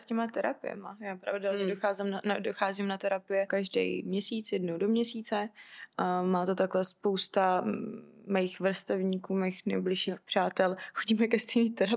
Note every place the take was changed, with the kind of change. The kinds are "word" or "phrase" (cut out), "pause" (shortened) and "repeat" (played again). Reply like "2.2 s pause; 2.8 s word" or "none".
3.5 s word